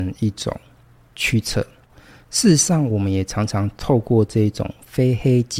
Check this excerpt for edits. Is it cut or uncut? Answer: uncut